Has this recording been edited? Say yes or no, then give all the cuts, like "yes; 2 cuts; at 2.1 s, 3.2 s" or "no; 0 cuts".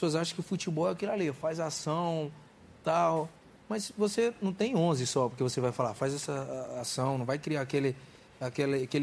no; 0 cuts